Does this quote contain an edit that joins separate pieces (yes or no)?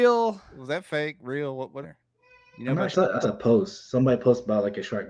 yes